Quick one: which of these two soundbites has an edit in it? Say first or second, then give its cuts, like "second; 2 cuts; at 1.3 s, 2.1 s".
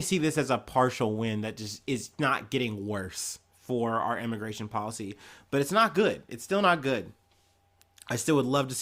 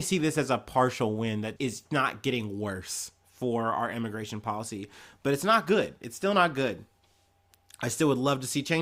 second; 1 cut; at 1.6 s